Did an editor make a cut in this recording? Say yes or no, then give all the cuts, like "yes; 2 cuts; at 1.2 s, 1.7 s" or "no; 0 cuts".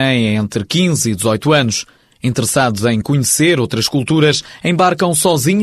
no; 0 cuts